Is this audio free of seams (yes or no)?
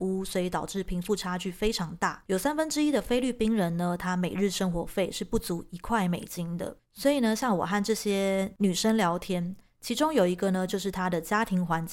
yes